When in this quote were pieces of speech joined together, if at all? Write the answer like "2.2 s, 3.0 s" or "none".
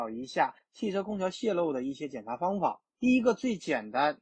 2.9 s